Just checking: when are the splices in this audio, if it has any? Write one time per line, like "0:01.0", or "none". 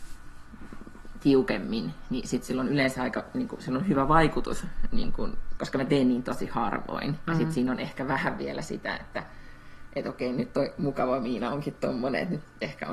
0:05.6